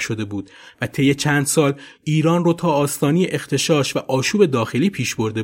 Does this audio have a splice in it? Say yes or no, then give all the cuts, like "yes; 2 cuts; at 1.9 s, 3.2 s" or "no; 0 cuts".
no; 0 cuts